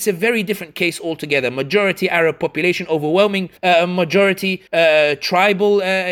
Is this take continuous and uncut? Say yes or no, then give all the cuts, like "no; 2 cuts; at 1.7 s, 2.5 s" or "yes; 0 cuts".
no; 2 cuts; at 3.6 s, 4.7 s